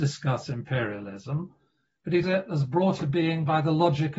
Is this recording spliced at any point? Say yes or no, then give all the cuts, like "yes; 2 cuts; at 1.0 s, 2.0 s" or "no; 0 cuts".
yes; 2 cuts; at 2.2 s, 3.0 s